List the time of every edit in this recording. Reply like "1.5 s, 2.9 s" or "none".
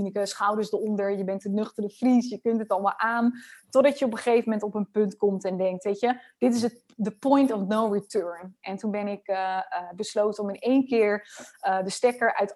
none